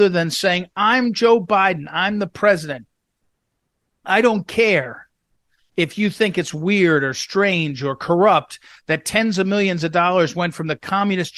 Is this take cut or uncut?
uncut